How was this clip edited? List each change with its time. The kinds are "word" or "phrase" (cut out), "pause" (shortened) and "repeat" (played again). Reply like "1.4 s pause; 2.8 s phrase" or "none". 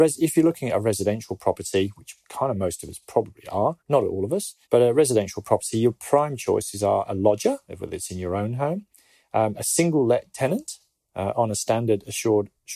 3.8 s pause; 4.6 s pause

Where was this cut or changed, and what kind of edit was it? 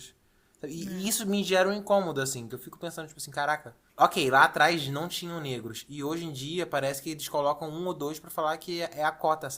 none

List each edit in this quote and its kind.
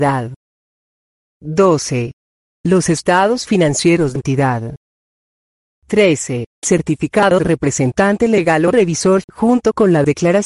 4.2 s word; 6.6 s word; 7.4 s word; 9.2 s word

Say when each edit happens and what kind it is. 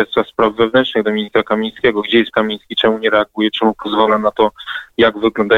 2.3 s word

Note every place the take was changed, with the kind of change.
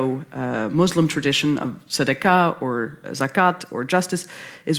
3.0 s word

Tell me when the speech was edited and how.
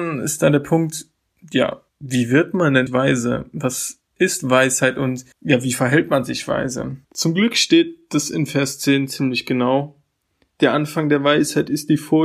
1.9 s pause; 2.9 s word; 5.3 s pause; 7.0 s pause

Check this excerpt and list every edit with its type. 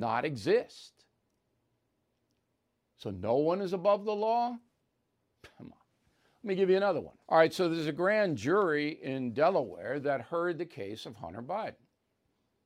7.2 s pause

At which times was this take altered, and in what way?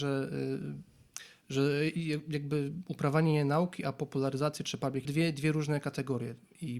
5.0 s phrase

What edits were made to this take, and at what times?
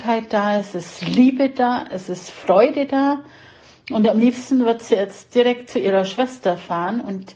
none

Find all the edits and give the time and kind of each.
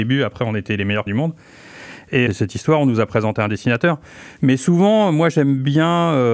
1.1 s word; 2.3 s phrase

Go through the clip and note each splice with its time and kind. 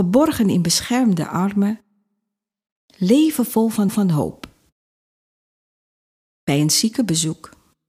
3.9 s repeat

